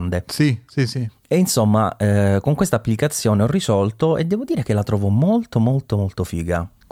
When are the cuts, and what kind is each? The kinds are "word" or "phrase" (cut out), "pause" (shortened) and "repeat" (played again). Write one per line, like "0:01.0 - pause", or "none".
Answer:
none

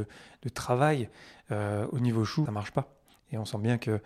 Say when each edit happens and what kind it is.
0:02.5 - phrase

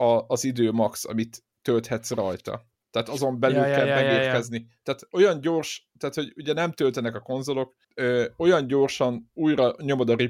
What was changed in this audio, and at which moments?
0:07.8 - pause

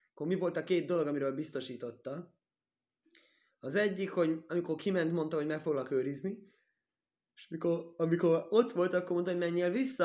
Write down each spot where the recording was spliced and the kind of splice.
none

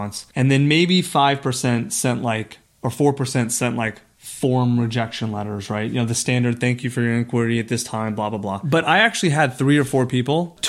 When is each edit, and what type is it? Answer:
none

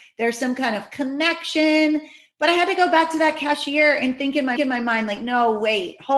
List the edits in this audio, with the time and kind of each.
0:04.6 - repeat

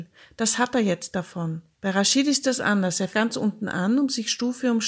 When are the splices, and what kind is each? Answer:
0:01.7 - pause
0:03.1 - word

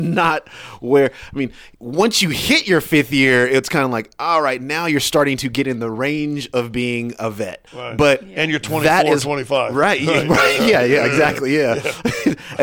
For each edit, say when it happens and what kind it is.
0:01.7 - pause
0:07.7 - pause

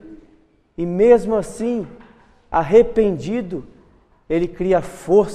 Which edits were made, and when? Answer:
none

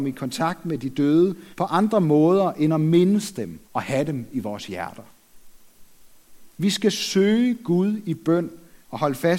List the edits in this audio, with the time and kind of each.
0:01.5 - pause
0:03.6 - pause
0:06.5 - pause

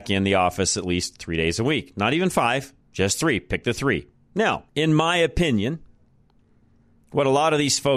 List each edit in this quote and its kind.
0:02.8 - pause
0:04.7 - pause

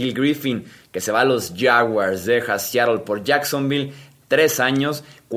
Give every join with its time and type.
none

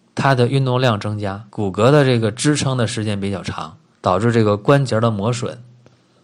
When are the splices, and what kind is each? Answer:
0:01.5 - pause
0:03.9 - pause

